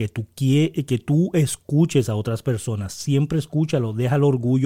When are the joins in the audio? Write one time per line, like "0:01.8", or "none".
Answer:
none